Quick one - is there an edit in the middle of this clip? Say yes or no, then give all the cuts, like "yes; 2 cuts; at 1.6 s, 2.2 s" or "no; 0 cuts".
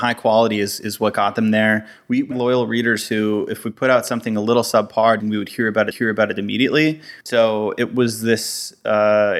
yes; 4 cuts; at 2.3 s, 5.2 s, 5.9 s, 7.2 s